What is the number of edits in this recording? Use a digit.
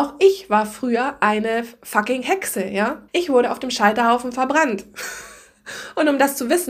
1